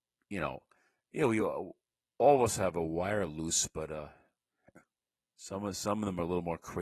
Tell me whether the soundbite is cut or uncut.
uncut